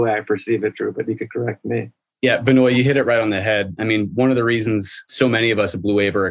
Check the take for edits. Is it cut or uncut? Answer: uncut